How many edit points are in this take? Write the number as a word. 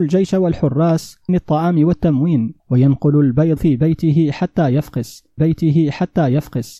four